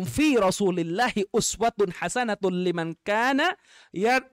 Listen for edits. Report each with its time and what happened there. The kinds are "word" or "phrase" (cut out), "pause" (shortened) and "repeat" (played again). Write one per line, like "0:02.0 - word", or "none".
none